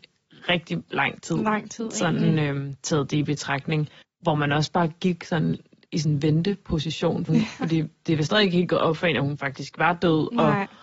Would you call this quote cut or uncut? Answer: cut